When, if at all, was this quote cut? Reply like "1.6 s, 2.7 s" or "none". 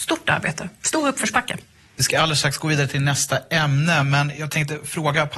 none